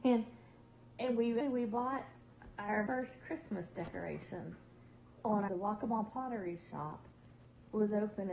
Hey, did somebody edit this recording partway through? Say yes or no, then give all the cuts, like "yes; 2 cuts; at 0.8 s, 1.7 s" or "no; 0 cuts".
yes; 3 cuts; at 1.4 s, 2.9 s, 5.5 s